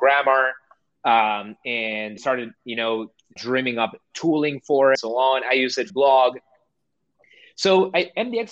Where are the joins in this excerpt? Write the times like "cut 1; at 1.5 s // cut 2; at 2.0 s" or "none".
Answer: cut 1; at 2.2 s // cut 2; at 3.4 s // cut 3; at 4.9 s // cut 4; at 5.9 s